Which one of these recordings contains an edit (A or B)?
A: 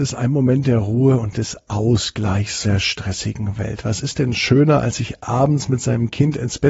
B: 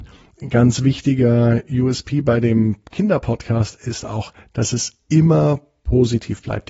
A